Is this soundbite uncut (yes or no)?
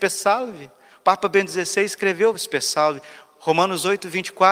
yes